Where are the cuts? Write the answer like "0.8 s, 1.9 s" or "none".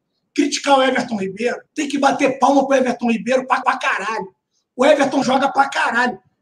1.7 s, 3.6 s, 5.2 s